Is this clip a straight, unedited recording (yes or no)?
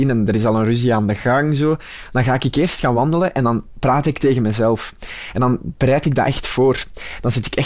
yes